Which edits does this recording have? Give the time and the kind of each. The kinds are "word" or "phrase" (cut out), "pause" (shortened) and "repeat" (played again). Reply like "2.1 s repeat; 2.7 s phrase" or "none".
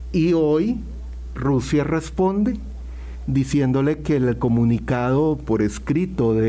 1.4 s word